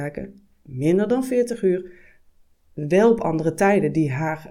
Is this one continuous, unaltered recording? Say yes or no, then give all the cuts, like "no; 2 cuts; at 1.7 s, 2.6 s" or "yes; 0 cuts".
yes; 0 cuts